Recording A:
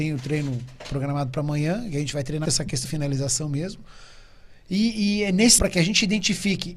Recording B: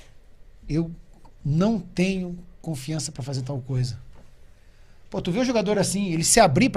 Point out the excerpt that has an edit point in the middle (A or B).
A